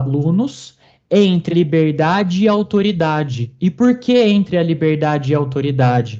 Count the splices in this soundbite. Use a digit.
1